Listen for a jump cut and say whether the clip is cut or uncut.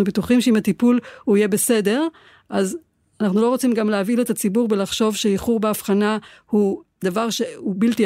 uncut